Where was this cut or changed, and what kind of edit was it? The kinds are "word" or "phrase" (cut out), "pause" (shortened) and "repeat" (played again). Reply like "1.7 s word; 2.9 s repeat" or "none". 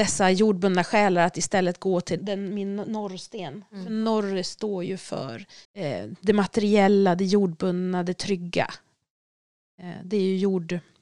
2.2 s word; 5.6 s pause